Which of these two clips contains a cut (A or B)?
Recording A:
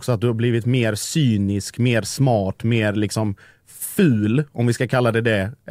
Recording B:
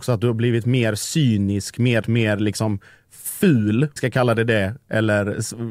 B